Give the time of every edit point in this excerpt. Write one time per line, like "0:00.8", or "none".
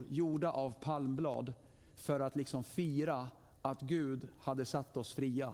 none